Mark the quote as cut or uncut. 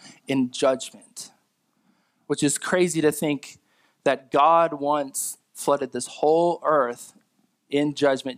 uncut